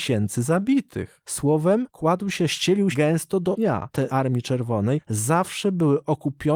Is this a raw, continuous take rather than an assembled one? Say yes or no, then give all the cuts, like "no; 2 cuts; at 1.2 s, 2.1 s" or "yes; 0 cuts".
no; 4 cuts; at 1.9 s, 2.9 s, 3.5 s, 4.1 s